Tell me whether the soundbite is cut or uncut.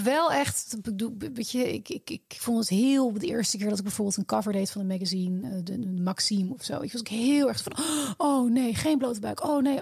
uncut